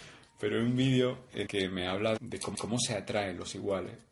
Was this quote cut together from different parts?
yes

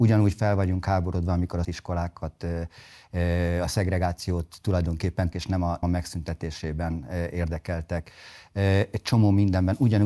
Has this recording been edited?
yes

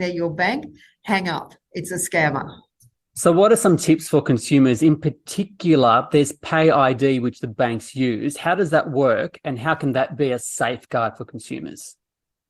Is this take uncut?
yes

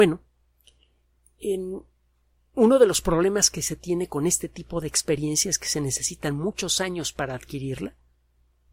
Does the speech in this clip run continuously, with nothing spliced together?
yes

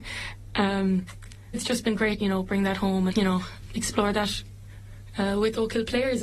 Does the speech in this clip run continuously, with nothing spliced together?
no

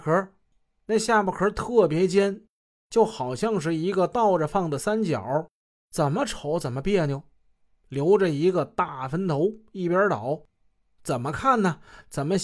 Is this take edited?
no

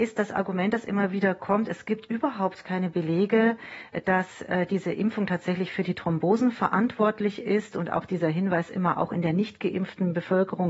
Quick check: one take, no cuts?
yes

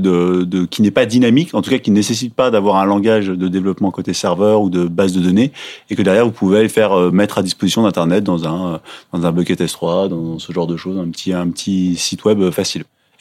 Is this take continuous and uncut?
yes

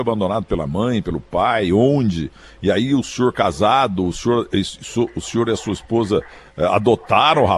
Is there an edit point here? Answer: no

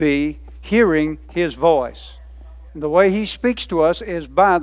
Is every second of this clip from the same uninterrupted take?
no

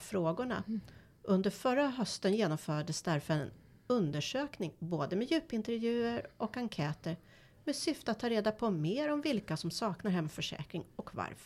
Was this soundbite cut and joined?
no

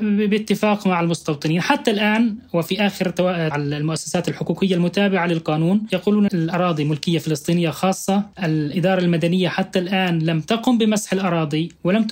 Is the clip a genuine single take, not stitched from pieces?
no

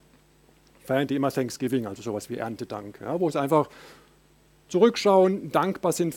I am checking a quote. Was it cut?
no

